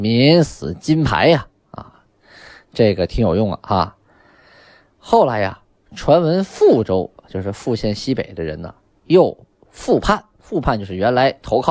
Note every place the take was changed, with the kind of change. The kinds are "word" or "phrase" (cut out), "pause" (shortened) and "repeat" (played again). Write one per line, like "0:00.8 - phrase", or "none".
none